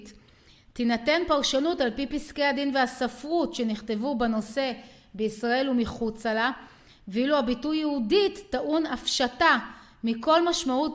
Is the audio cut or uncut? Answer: uncut